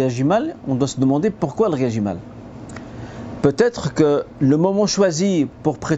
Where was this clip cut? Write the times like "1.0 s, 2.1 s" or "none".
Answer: none

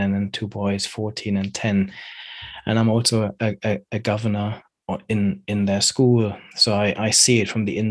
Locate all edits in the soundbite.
none

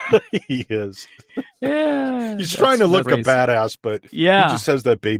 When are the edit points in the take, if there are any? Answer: 3.0 s, 4.1 s

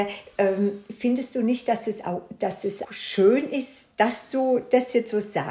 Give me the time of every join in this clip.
2.8 s, 3.9 s

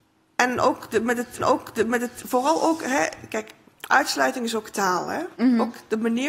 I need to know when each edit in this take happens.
1.4 s, 5.3 s

